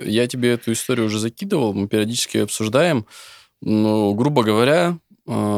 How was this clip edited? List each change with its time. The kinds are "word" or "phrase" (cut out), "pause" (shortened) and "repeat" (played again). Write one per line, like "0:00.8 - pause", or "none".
none